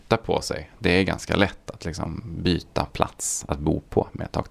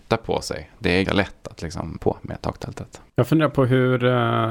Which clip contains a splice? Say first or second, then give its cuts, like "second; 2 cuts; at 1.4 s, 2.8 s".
second; 3 cuts; at 1.0 s, 2.0 s, 3.1 s